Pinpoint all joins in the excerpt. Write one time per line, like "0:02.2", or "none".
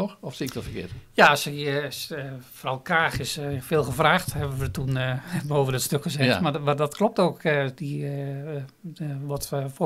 none